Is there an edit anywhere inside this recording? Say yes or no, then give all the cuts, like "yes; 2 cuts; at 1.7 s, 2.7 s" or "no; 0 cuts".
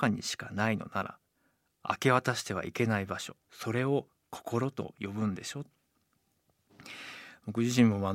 yes; 1 cut; at 3.4 s